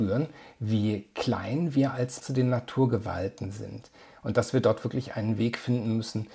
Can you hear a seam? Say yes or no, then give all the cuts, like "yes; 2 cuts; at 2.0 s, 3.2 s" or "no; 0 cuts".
yes; 1 cut; at 2.2 s